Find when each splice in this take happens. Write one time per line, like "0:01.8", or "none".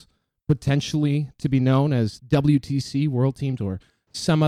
0:02.2
0:03.6